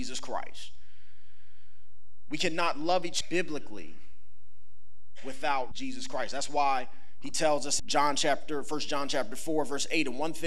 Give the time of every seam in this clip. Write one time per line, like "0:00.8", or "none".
0:03.2
0:05.7
0:07.8